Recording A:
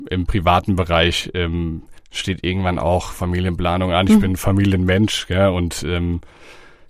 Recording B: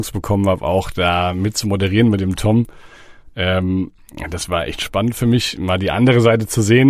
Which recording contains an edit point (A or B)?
A